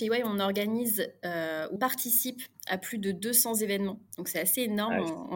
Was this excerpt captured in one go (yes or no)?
no